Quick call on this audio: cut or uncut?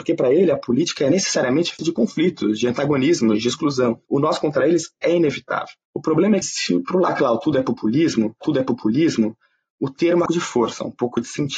cut